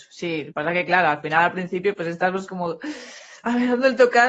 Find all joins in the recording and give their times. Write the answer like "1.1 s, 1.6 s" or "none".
none